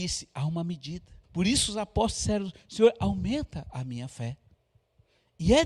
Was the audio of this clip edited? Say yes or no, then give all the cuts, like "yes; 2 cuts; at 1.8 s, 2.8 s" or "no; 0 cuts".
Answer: yes; 1 cut; at 1.2 s